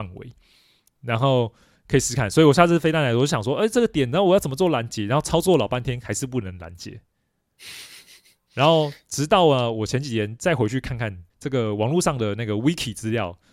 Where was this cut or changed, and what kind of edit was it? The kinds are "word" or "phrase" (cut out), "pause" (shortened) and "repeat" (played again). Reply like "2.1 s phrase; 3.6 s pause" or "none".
11.3 s pause